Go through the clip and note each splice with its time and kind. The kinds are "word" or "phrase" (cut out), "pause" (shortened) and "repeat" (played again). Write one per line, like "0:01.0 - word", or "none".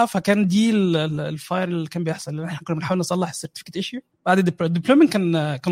none

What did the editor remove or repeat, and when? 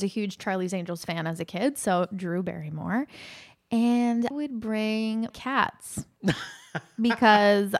0:04.3 - word
0:05.3 - word

